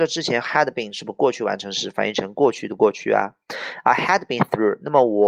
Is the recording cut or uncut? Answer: uncut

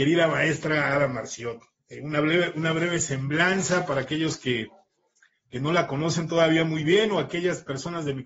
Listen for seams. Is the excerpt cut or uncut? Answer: uncut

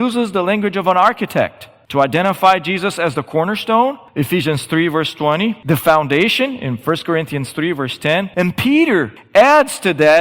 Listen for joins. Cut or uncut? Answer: uncut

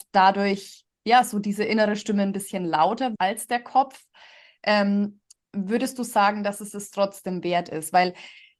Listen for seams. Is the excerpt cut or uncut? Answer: cut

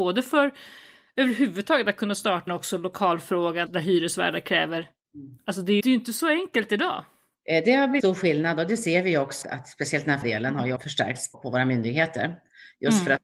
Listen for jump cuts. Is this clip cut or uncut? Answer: cut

